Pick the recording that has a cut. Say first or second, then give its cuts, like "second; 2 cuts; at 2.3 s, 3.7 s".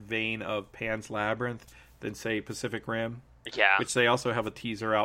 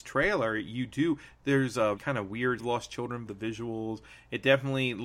second; 3 cuts; at 2.0 s, 2.6 s, 3.3 s